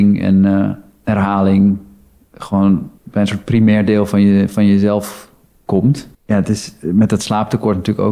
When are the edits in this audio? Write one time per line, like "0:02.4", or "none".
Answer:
0:03.0
0:06.1